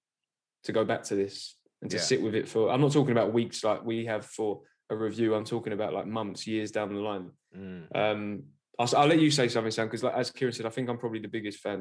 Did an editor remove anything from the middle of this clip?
no; 0 cuts

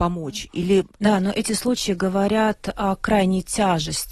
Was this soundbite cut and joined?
yes; 1 cut; at 0.9 s

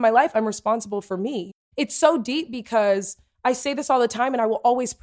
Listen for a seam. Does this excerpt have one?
no; 0 cuts

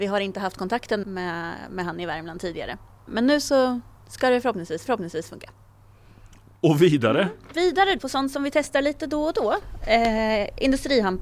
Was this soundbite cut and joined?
yes; 5 cuts; at 1.0 s, 2.9 s, 4.0 s, 4.9 s, 8.0 s

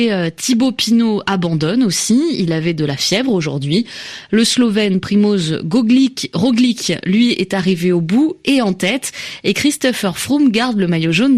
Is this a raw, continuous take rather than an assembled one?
yes; 0 cuts

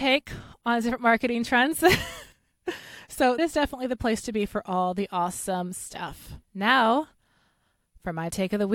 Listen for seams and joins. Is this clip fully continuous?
no; 3 cuts; at 2.3 s, 3.4 s, 6.4 s

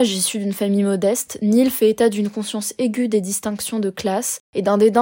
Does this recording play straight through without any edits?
yes; 0 cuts

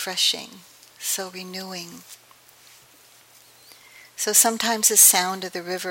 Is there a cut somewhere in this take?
no; 0 cuts

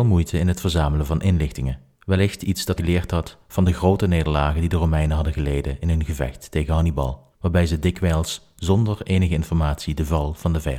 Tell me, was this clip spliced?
yes; 3 cuts; at 1.9 s, 2.8 s, 7.3 s

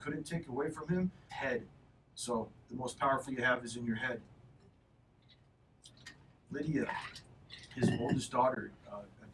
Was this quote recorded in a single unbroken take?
no; 3 cuts; at 1.3 s, 2.7 s, 3.3 s

